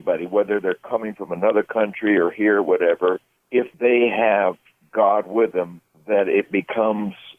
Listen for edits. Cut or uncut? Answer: cut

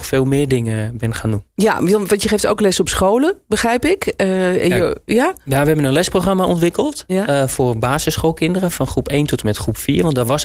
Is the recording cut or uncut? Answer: uncut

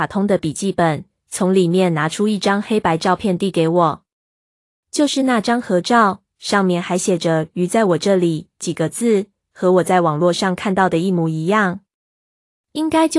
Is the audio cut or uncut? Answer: uncut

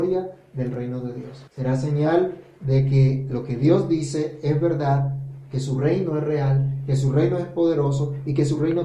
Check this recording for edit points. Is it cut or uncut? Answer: cut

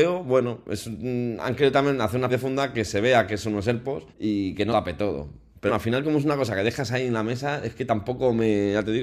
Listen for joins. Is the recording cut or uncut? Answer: cut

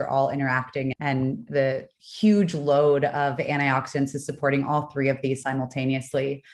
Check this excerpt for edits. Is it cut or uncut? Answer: cut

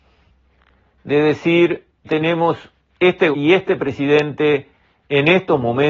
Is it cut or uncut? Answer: cut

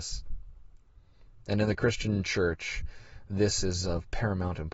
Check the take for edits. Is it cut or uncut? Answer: uncut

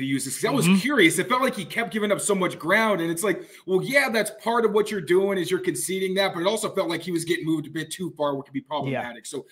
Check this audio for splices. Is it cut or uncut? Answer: uncut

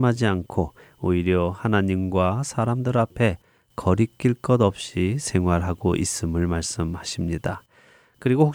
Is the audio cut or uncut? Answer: uncut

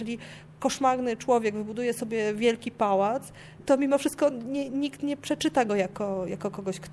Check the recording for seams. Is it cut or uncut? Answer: uncut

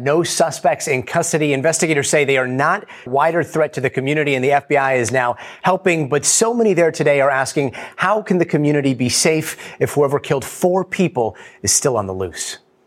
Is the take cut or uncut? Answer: cut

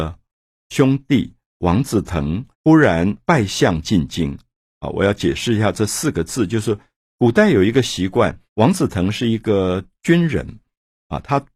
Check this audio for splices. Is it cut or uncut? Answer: cut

